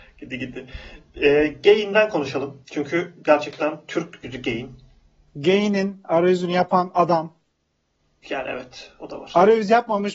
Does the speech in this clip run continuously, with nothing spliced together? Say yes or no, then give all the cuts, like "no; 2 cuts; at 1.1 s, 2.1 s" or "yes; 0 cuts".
no; 2 cuts; at 2.6 s, 4.2 s